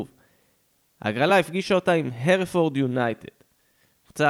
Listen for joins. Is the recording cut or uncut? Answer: uncut